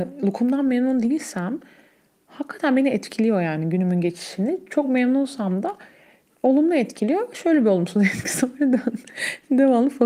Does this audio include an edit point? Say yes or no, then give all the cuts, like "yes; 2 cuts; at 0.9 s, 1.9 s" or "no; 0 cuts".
no; 0 cuts